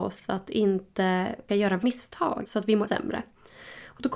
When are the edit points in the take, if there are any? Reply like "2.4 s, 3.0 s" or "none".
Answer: 1.5 s, 2.4 s, 2.9 s